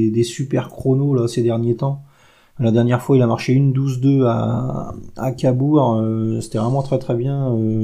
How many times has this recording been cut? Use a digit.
0